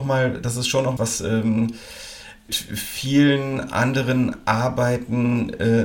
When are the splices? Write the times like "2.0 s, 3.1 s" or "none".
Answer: 1.0 s, 2.5 s

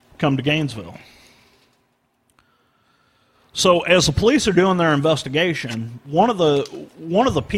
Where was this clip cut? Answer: none

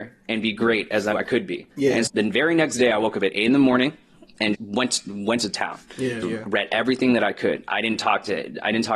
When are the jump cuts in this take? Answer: 1.1 s, 1.7 s, 2.1 s, 4.5 s, 6.2 s

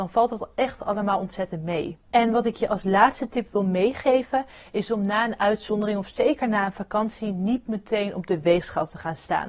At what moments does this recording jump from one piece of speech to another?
2.0 s

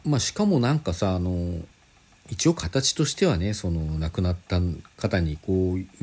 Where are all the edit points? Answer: none

